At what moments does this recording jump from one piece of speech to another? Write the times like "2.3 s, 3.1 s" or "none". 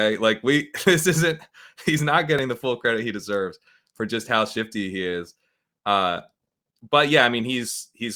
none